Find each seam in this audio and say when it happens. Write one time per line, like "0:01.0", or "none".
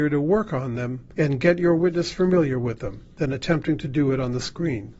0:01.1
0:03.1